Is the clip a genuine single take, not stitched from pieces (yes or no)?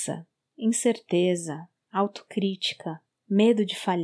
no